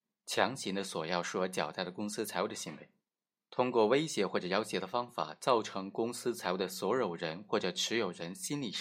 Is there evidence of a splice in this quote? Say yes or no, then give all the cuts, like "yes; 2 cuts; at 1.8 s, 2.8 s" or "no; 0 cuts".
yes; 1 cut; at 3.3 s